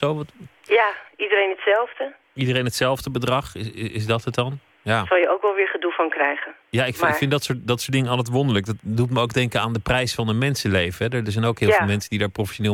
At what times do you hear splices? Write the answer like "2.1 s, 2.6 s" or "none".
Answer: 2.2 s, 6.6 s